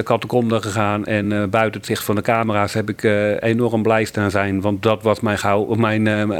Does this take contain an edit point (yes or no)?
no